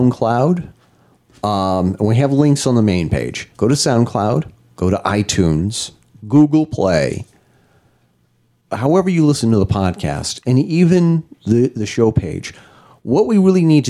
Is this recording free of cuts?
no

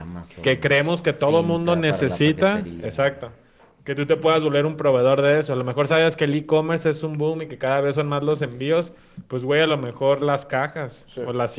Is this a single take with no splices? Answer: yes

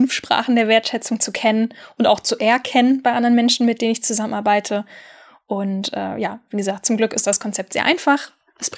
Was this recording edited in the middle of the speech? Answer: no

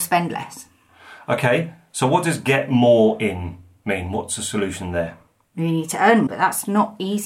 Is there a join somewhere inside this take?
yes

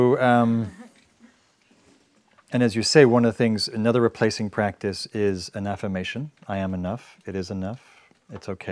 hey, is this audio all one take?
yes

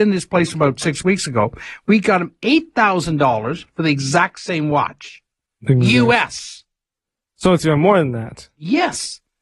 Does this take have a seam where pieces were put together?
no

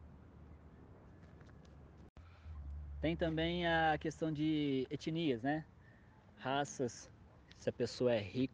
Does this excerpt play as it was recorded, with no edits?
yes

